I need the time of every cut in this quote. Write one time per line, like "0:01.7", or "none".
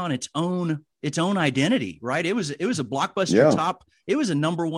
0:00.9